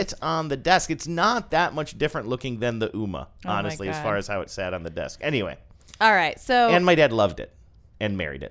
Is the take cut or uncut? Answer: uncut